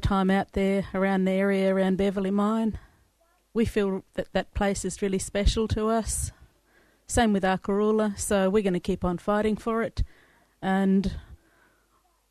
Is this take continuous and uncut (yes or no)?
yes